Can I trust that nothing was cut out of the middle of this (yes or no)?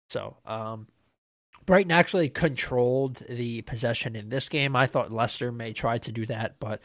yes